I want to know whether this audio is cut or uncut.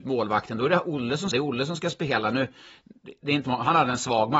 cut